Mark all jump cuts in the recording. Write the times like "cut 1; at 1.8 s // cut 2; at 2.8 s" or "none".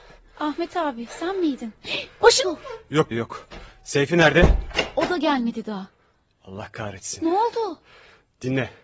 cut 1; at 2.4 s // cut 2; at 3.1 s